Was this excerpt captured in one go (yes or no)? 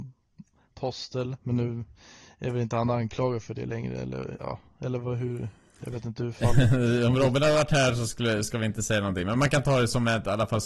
yes